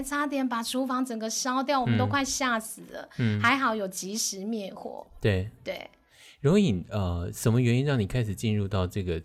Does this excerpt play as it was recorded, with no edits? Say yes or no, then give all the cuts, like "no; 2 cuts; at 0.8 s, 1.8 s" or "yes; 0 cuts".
yes; 0 cuts